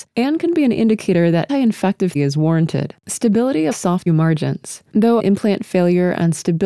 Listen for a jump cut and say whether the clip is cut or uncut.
cut